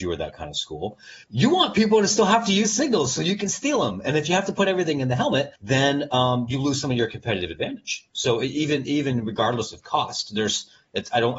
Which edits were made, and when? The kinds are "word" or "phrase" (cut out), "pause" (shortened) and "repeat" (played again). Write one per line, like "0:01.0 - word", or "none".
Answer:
0:01.2 - pause
0:05.6 - pause